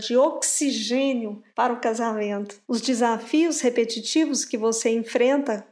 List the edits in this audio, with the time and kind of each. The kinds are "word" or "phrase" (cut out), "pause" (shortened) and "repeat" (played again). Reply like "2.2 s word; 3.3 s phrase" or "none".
1.5 s pause; 2.6 s pause